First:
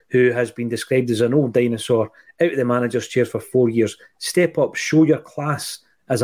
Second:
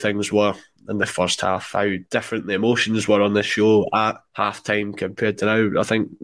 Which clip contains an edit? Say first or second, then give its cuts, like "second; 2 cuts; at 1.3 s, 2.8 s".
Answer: second; 2 cuts; at 2.0 s, 4.2 s